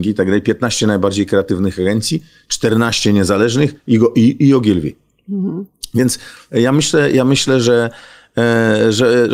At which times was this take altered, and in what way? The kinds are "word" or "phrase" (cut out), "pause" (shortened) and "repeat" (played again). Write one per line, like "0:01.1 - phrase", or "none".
none